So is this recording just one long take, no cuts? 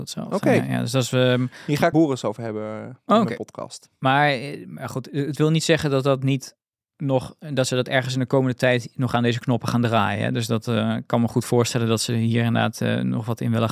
no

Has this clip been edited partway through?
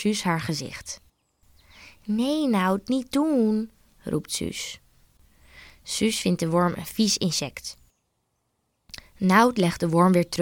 no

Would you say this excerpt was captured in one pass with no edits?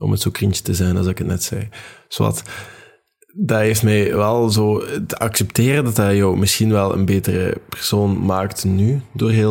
yes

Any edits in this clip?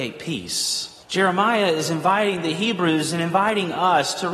yes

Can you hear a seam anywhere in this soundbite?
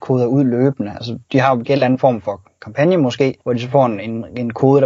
yes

